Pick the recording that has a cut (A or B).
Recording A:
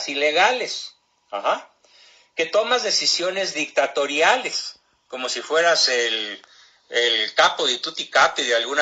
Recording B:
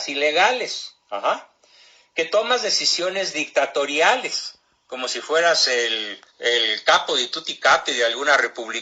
B